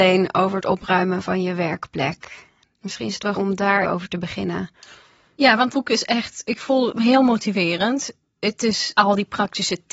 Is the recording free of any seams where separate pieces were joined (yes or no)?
no